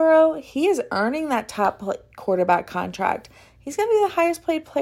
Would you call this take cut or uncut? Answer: uncut